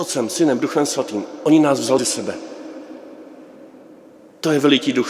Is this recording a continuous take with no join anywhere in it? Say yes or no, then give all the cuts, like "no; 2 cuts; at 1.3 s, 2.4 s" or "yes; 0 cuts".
no; 1 cut; at 2.0 s